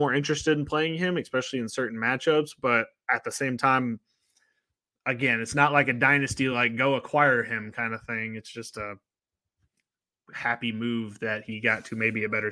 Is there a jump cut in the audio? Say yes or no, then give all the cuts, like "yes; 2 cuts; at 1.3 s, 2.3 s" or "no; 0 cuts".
no; 0 cuts